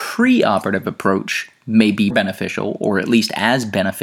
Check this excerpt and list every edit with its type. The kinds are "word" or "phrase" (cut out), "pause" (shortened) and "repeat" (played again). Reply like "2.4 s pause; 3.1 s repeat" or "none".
2.1 s word